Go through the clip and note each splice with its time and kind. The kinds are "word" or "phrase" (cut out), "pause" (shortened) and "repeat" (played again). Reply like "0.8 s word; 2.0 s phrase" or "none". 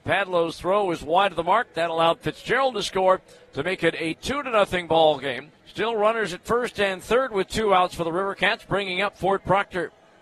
5.6 s pause